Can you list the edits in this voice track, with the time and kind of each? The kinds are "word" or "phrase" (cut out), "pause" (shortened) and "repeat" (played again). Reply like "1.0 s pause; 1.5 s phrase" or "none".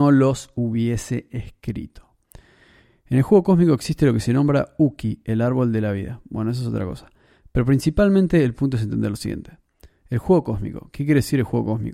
none